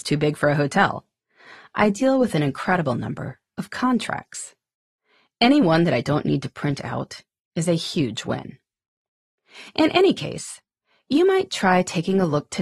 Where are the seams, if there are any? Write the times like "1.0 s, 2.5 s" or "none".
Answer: none